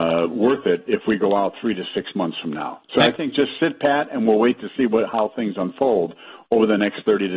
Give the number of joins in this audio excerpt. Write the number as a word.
one